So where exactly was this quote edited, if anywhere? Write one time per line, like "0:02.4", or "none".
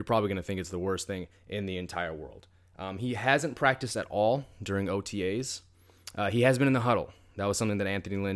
0:01.4